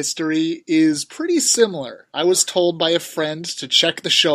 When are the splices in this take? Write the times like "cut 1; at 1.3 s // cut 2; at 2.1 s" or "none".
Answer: none